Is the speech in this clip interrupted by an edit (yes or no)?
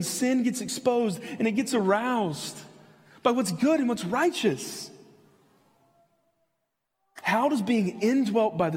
no